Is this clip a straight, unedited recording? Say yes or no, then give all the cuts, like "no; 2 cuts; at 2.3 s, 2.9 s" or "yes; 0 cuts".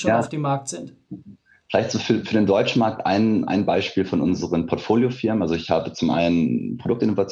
yes; 0 cuts